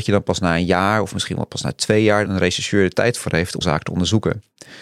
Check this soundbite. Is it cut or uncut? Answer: cut